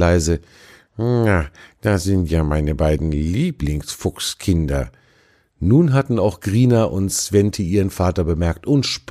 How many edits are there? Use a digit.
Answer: 0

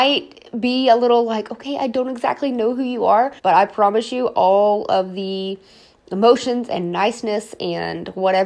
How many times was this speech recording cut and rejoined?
1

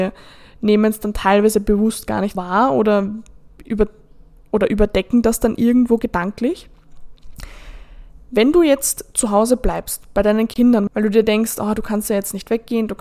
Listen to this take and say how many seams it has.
1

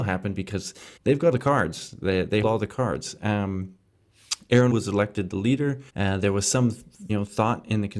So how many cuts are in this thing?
6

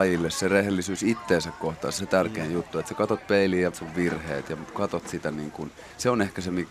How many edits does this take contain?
2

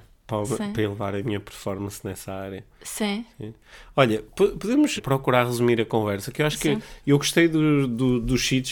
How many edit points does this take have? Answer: 1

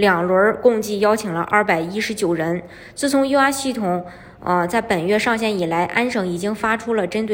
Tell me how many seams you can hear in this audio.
0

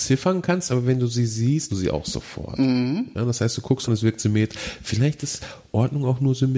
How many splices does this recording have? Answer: 2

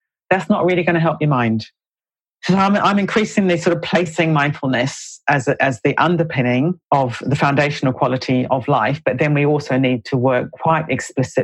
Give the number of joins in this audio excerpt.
1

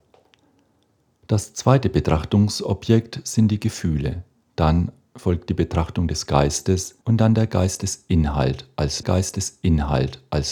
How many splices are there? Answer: 2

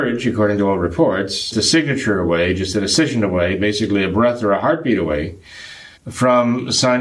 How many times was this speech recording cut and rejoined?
2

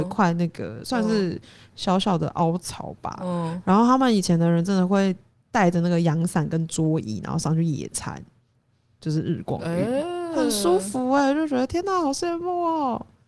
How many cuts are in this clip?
0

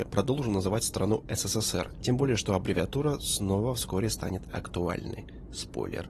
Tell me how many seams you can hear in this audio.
0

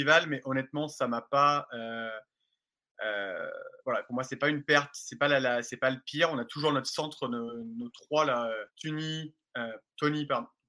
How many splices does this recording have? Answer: 2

